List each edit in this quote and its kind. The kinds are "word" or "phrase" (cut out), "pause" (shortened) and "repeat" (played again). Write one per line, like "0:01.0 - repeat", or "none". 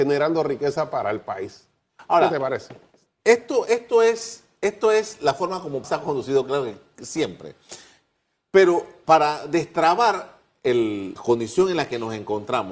0:05.8 - word
0:09.0 - word
0:11.2 - word